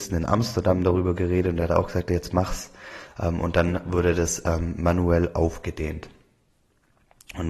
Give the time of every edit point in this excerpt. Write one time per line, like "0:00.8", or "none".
none